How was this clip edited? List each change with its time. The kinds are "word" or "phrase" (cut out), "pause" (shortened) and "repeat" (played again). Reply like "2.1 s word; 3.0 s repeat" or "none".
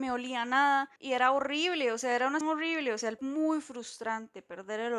1.0 s pause; 2.4 s word; 3.2 s phrase